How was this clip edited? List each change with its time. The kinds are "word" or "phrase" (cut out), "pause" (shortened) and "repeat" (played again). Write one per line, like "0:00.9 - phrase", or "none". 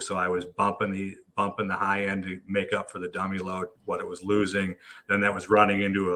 0:03.8 - pause